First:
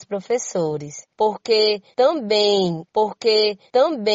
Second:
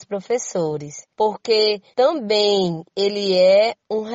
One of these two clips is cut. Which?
first; 1 cut; at 2.9 s

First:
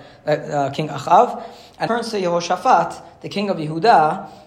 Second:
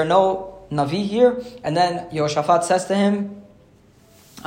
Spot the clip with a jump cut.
first; 1 cut; at 1.9 s

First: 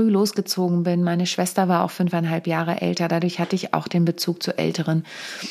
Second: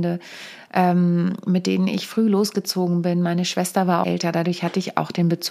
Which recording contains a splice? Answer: second; 1 cut; at 4.0 s

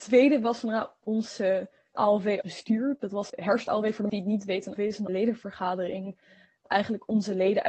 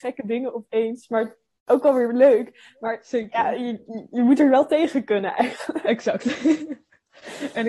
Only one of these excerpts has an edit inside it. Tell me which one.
first; 7 cuts; at 2.0 s, 2.4 s, 3.3 s, 4.1 s, 4.8 s, 5.1 s, 6.7 s

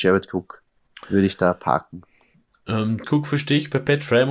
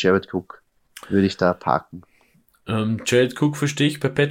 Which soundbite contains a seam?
first; 1 cut; at 3.0 s

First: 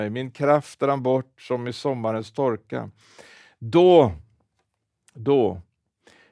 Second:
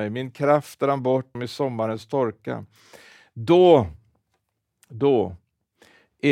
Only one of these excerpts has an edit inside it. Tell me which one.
second; 1 cut; at 1.3 s

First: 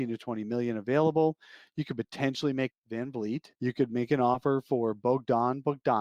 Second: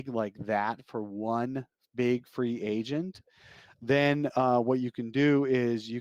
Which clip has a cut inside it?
first; 2 cuts; at 2.7 s, 3.6 s

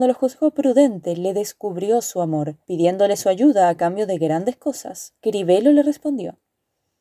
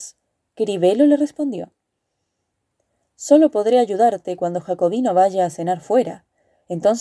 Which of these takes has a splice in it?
first; 2 cuts; at 2.6 s, 5.2 s

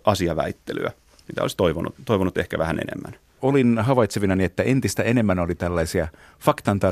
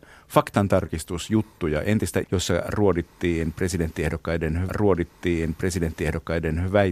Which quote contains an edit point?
second; 2 cuts; at 2.2 s, 4.7 s

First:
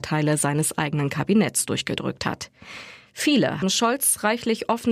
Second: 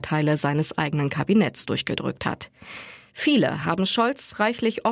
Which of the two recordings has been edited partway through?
first; 1 cut; at 3.6 s

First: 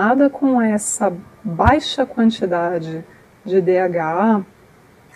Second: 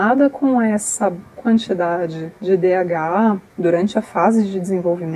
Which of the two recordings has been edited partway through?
second; 3 cuts; at 1.4 s, 2.4 s, 3.5 s

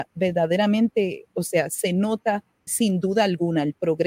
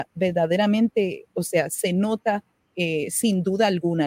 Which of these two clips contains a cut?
first; 1 cut; at 2.7 s

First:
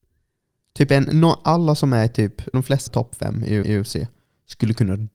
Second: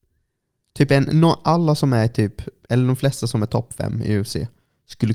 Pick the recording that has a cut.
first; 3 cuts; at 2.5 s, 2.9 s, 3.6 s

